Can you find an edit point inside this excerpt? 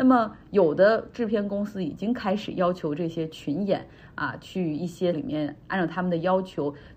yes; 1 cut; at 5.1 s

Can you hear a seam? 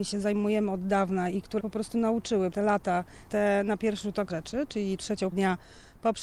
yes; 5 cuts; at 1.6 s, 2.5 s, 3.3 s, 4.3 s, 5.3 s

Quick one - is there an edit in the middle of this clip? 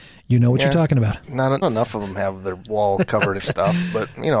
yes; 2 cuts; at 1.6 s, 3.4 s

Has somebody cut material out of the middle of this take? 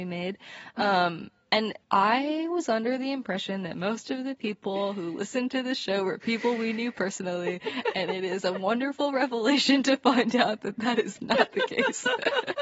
yes; 1 cut; at 1.8 s

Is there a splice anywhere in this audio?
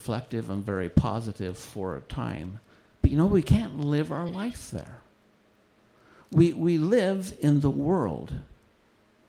no; 0 cuts

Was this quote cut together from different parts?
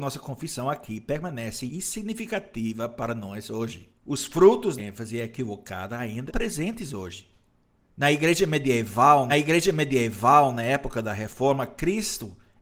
yes; 6 cuts; at 1.7 s, 4.0 s, 4.8 s, 6.3 s, 7.7 s, 9.3 s

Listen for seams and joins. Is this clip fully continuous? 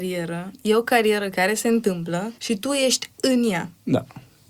no; 1 cut; at 2.4 s

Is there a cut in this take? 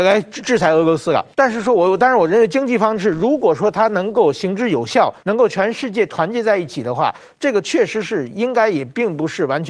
yes; 2 cuts; at 1.3 s, 5.2 s

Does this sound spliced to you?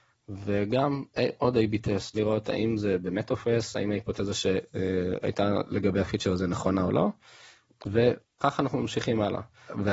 yes; 1 cut; at 2.1 s

